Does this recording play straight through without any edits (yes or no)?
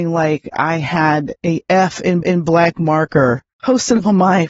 no